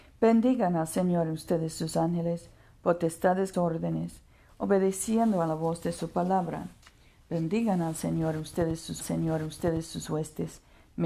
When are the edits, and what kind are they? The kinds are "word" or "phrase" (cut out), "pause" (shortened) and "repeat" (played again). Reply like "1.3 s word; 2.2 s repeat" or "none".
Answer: 3.5 s phrase; 9.0 s repeat